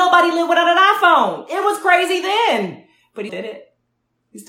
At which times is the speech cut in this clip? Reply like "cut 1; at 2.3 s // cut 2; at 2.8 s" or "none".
cut 1; at 3.3 s